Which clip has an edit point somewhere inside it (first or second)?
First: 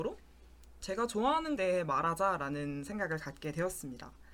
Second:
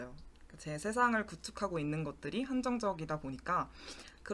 first